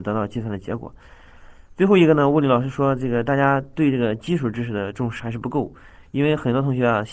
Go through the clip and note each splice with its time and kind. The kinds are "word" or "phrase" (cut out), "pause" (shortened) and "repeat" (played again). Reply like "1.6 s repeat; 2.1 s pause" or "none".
5.2 s word